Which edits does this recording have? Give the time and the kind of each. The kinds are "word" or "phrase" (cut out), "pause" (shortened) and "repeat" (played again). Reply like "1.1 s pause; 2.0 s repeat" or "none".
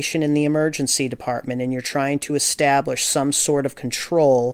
none